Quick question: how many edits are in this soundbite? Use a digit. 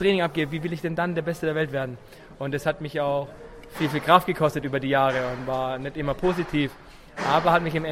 0